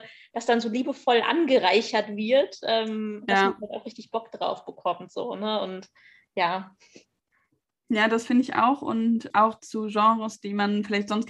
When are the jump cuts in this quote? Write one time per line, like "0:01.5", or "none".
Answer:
none